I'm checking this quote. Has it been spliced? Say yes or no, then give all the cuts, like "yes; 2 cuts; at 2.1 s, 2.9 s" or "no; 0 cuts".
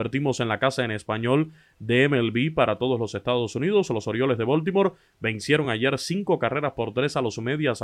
no; 0 cuts